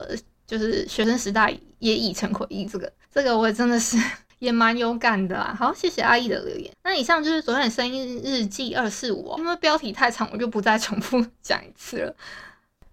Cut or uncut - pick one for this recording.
cut